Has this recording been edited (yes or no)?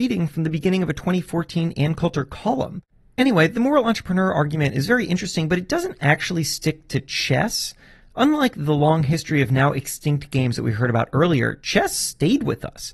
no